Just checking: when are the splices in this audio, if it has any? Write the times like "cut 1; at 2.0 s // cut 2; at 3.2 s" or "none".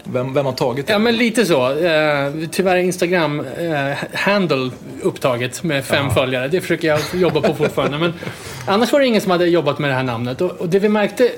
none

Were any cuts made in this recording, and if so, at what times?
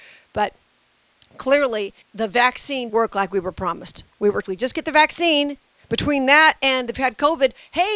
cut 1; at 2.0 s // cut 2; at 2.9 s // cut 3; at 4.1 s // cut 4; at 4.4 s // cut 5; at 6.9 s

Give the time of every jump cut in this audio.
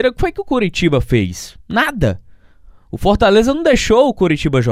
none

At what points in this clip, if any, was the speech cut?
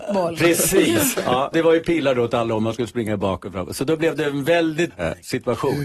cut 1; at 1.5 s // cut 2; at 4.9 s

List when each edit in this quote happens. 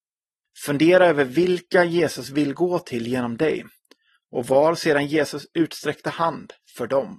none

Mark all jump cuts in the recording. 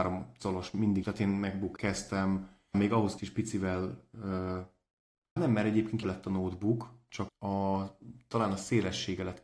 cut 1; at 1.0 s // cut 2; at 1.8 s // cut 3; at 2.7 s // cut 4; at 3.2 s // cut 5; at 5.4 s // cut 6; at 6.0 s // cut 7; at 7.3 s

